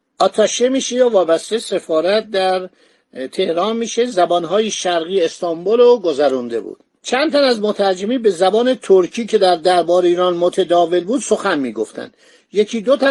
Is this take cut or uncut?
uncut